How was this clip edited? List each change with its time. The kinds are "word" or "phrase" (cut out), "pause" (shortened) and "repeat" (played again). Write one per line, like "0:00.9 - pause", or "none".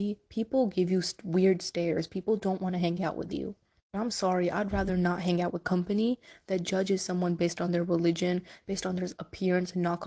none